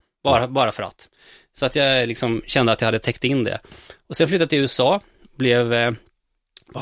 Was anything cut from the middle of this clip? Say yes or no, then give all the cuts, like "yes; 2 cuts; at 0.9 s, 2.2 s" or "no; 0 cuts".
no; 0 cuts